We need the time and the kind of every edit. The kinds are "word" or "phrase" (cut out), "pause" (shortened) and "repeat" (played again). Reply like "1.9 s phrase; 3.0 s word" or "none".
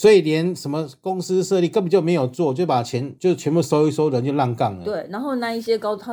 3.2 s pause